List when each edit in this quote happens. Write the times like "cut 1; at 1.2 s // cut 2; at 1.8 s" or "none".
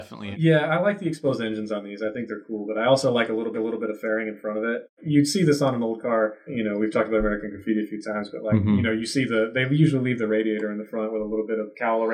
cut 1; at 3.5 s